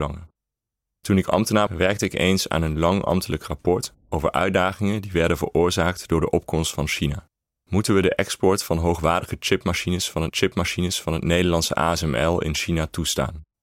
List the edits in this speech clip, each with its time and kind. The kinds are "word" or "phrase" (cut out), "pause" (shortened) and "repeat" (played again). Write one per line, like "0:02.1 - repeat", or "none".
0:01.7 - word
0:07.4 - pause
0:10.3 - repeat

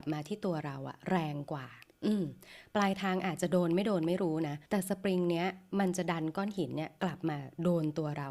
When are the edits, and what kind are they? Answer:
0:02.0 - pause
0:04.7 - pause

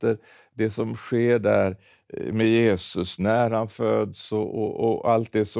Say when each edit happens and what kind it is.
none

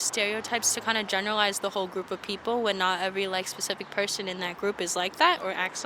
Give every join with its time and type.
none

